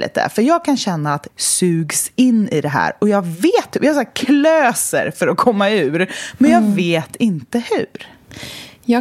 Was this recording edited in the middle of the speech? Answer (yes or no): yes